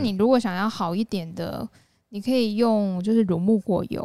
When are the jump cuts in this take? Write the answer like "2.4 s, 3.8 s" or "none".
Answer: none